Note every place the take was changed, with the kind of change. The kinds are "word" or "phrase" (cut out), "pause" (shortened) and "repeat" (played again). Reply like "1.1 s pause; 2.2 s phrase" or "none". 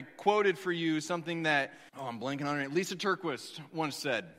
1.9 s word